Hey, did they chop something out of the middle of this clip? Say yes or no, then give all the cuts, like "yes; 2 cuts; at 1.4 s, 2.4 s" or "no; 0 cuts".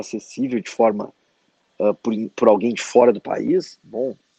no; 0 cuts